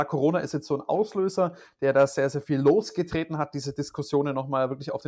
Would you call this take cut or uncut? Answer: uncut